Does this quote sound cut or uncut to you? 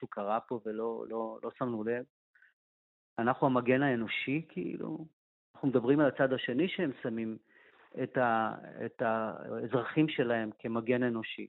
uncut